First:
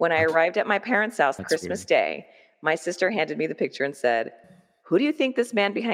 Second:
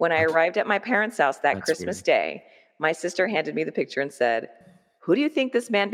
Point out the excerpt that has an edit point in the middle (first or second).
first